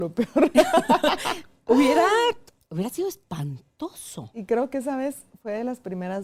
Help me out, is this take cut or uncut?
uncut